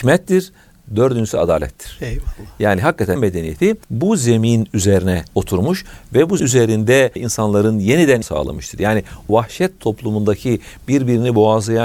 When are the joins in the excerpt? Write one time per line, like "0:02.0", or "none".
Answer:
0:03.2
0:03.8
0:05.3
0:06.4
0:07.2
0:08.2
0:09.3